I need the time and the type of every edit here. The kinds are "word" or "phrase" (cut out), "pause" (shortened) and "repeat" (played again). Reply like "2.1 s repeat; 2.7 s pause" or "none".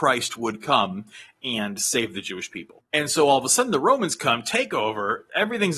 2.9 s pause